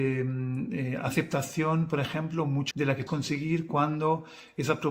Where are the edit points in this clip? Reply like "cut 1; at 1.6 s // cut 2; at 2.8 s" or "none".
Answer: cut 1; at 2.7 s // cut 2; at 3.1 s